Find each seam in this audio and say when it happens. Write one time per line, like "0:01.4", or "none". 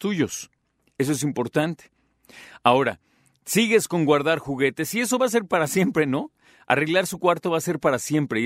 none